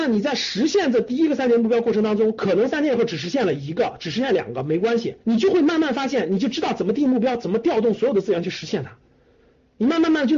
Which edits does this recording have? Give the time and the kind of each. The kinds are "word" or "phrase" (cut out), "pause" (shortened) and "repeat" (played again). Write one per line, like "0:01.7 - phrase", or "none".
0:05.2 - pause